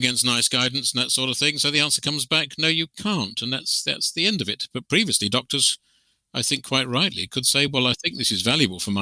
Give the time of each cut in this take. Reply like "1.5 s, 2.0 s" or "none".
none

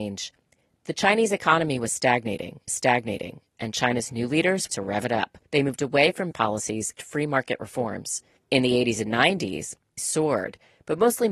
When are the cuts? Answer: 2.7 s, 4.7 s, 5.4 s, 6.3 s, 7.0 s, 8.4 s, 10.0 s

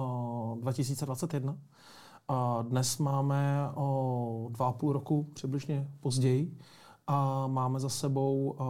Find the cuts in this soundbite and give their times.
none

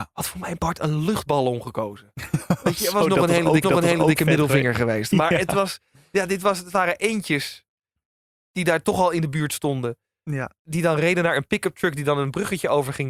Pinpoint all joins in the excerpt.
3.6 s

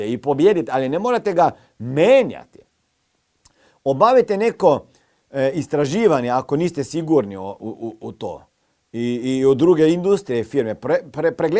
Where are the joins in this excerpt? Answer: none

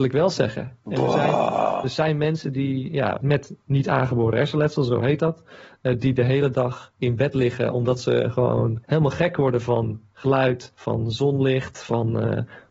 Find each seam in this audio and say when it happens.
3.2 s, 8.8 s, 10.7 s

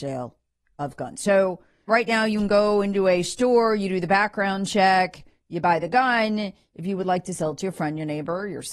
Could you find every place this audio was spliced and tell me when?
1.9 s

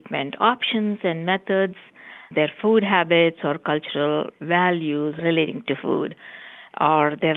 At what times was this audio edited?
none

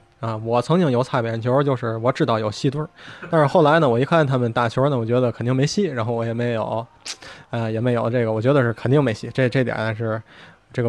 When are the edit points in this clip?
none

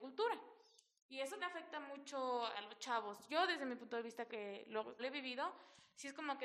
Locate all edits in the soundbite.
1.4 s, 2.5 s, 4.3 s, 5.0 s

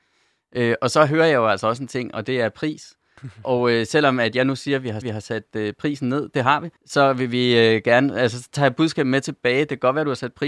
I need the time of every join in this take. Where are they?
5.0 s, 6.8 s

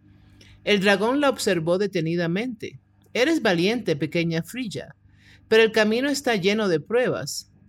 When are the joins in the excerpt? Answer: none

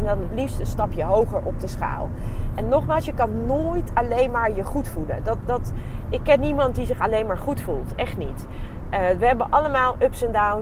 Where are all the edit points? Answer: none

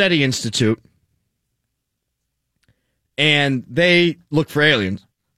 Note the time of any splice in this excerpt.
none

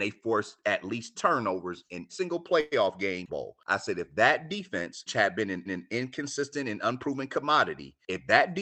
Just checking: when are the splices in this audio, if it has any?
1.1 s, 2.1 s, 3.3 s, 5.1 s, 5.7 s

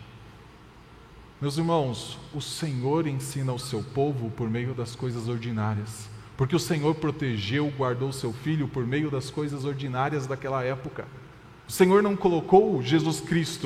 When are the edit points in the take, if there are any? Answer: 1.3 s, 11.6 s

